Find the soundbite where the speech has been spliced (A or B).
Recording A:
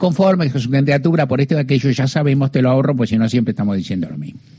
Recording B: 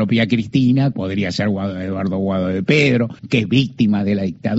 B